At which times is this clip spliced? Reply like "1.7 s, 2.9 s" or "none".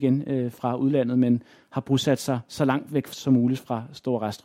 none